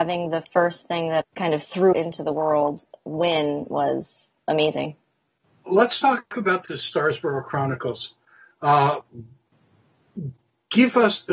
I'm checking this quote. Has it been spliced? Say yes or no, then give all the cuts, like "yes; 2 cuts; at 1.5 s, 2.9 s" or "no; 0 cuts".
yes; 4 cuts; at 1.2 s, 1.9 s, 4.4 s, 5.7 s